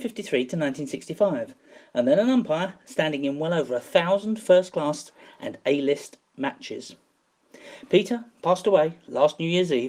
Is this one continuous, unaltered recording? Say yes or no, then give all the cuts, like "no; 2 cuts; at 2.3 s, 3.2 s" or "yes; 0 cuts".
yes; 0 cuts